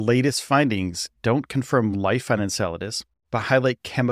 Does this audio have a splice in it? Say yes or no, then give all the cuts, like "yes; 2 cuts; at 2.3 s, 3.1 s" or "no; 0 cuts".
no; 0 cuts